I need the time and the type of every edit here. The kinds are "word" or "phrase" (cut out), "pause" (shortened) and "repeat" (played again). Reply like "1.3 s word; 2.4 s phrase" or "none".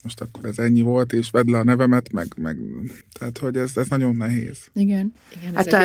3.0 s pause